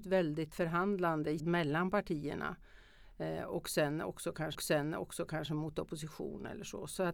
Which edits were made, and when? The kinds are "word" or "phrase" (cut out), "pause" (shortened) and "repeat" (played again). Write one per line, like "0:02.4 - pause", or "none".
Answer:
0:01.4 - word
0:04.5 - repeat